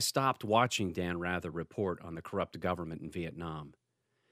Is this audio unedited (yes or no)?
yes